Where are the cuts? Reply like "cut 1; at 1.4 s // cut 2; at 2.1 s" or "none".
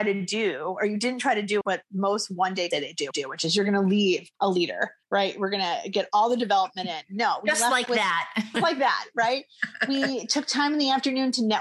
cut 1; at 1.6 s // cut 2; at 2.7 s // cut 3; at 3.1 s // cut 4; at 4.4 s // cut 5; at 5.0 s // cut 6; at 8.5 s

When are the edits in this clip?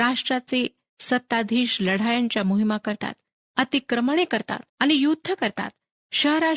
cut 1; at 4.7 s

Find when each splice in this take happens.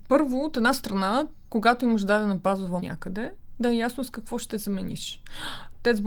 cut 1; at 1.5 s // cut 2; at 2.8 s

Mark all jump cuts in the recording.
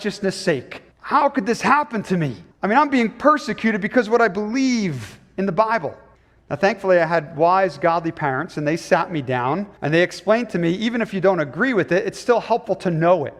cut 1; at 0.9 s // cut 2; at 2.5 s // cut 3; at 6.1 s // cut 4; at 9.8 s

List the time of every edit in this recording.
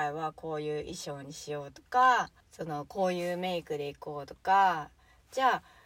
cut 1; at 2.4 s

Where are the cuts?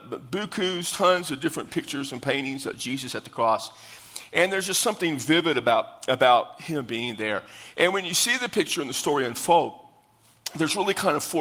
none

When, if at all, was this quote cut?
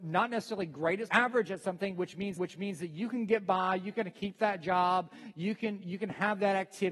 cut 1; at 1.1 s // cut 2; at 2.4 s

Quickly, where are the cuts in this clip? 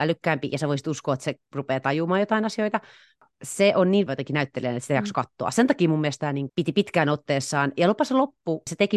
cut 1; at 4.1 s // cut 2; at 6.5 s

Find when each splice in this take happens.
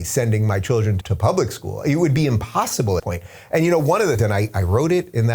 cut 1; at 1.0 s // cut 2; at 3.0 s // cut 3; at 4.2 s

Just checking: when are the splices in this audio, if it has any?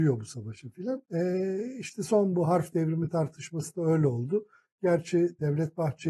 cut 1; at 1.1 s

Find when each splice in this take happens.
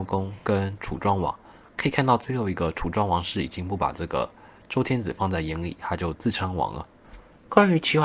none

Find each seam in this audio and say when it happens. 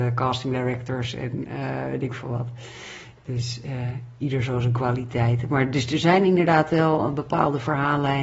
none

